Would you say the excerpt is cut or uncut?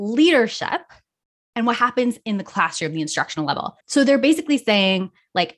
cut